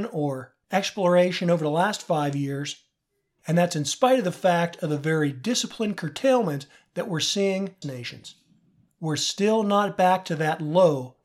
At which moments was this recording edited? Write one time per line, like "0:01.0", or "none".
0:07.8